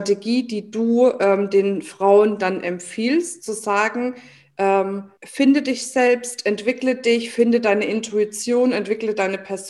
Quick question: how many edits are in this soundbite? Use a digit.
1